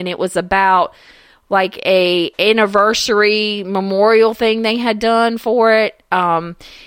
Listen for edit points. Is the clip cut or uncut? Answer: uncut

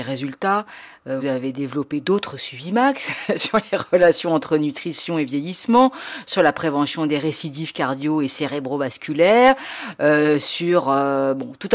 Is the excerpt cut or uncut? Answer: cut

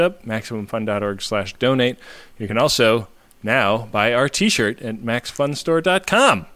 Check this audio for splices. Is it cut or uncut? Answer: uncut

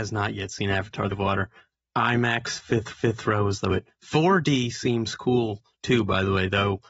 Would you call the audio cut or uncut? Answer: cut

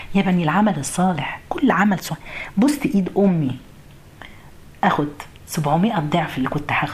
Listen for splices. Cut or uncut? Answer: uncut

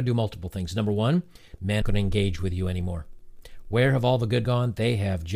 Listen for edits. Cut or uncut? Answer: cut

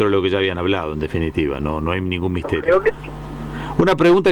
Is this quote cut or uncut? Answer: uncut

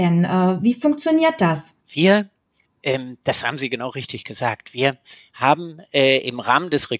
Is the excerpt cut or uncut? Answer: cut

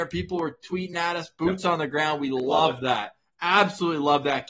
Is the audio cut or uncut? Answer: uncut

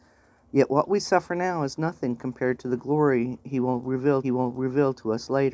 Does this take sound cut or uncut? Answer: cut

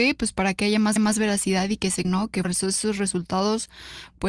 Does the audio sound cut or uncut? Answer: cut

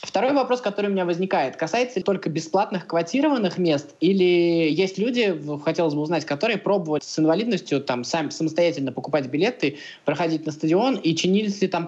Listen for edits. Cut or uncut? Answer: cut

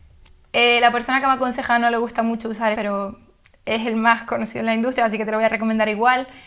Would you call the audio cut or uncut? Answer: cut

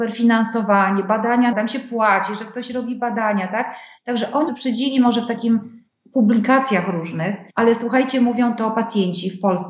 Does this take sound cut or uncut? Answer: cut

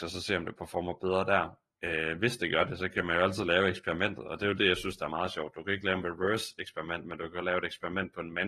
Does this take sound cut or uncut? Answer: uncut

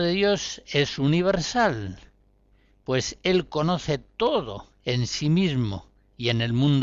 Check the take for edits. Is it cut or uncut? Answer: uncut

